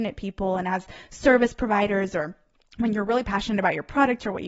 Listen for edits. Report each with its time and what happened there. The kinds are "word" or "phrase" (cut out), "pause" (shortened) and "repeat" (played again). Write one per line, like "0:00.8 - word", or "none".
none

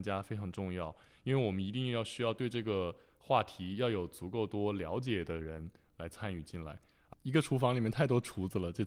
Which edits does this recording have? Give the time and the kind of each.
none

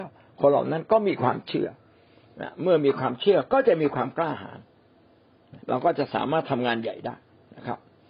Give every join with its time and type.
0:05.6 - pause

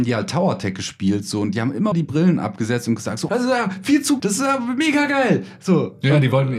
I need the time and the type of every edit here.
0:01.9 - word
0:03.3 - word
0:04.2 - word

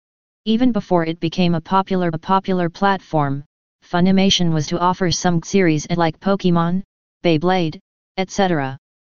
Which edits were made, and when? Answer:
0:02.1 - repeat
0:04.7 - word
0:05.4 - word
0:05.9 - word

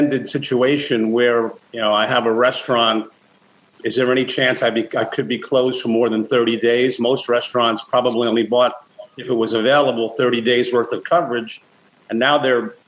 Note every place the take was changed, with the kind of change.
0:01.6 - pause

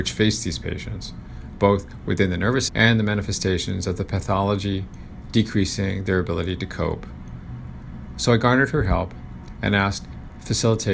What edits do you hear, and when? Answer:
0:02.7 - word

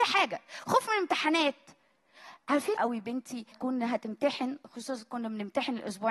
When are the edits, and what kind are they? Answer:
0:02.8 - phrase
0:03.5 - word

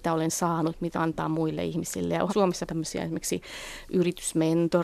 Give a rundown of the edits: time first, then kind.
0:00.9 - word
0:02.3 - word
0:02.7 - word

